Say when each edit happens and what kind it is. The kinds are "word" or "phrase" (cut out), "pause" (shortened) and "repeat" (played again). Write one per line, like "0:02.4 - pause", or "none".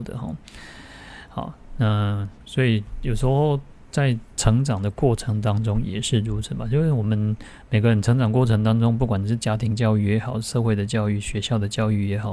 0:02.4 - pause
0:04.3 - pause